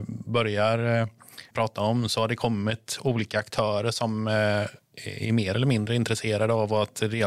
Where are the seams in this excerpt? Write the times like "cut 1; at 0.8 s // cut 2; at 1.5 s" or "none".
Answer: cut 1; at 1.5 s